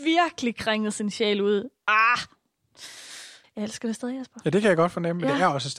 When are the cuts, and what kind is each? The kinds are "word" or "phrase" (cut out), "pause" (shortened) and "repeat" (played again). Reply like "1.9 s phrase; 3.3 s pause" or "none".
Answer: 3.4 s pause